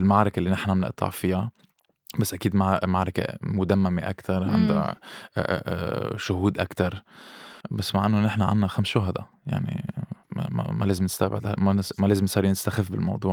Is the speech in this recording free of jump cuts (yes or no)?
no